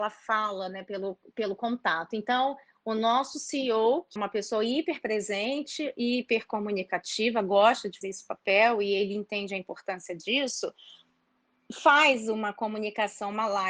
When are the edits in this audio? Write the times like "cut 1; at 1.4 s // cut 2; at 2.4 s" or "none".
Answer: cut 1; at 4.2 s // cut 2; at 8.0 s